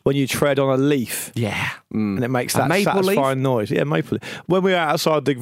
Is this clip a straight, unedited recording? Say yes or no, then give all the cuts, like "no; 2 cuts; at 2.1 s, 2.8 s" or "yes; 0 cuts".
yes; 0 cuts